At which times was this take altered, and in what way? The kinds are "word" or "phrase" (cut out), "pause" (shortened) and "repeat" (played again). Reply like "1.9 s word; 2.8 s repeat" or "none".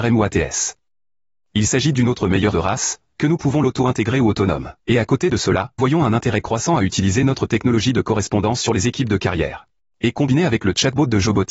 1.9 s word; 2.5 s word; 4.8 s pause; 5.8 s word; 9.9 s pause